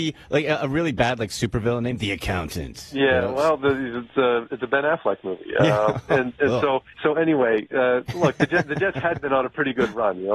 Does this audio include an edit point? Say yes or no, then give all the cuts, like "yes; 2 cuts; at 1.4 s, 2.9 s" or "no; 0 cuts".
yes; 1 cut; at 6.9 s